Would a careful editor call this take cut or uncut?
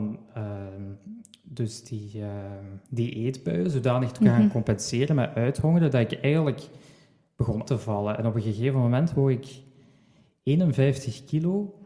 cut